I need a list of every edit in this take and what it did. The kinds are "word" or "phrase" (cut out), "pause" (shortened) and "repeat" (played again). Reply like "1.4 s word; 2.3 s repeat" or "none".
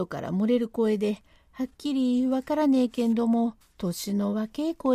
3.6 s pause